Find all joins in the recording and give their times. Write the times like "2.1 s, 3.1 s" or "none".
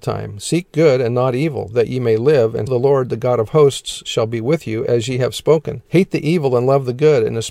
2.7 s, 5.9 s